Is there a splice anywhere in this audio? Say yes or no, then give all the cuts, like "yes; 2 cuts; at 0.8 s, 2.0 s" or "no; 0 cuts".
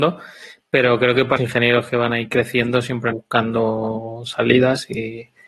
yes; 2 cuts; at 1.4 s, 3.1 s